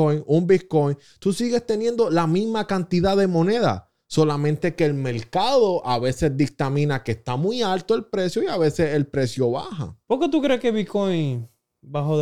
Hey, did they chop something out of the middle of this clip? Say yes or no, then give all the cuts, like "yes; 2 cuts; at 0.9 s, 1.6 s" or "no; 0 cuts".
yes; 1 cut; at 10.0 s